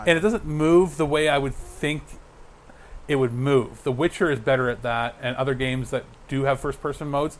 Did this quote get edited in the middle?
no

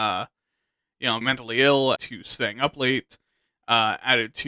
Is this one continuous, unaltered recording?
no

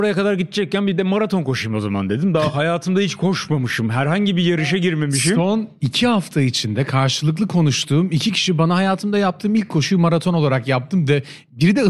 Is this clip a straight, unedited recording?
yes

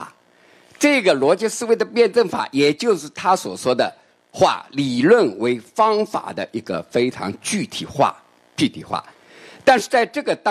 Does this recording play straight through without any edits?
yes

